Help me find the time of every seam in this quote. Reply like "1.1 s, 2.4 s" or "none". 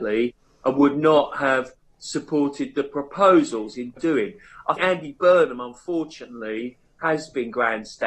4.0 s, 4.8 s